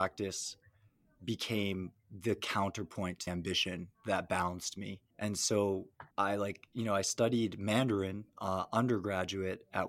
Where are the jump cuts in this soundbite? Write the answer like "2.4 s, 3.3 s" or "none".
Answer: 3.3 s, 3.9 s, 5.1 s, 6.1 s, 8.3 s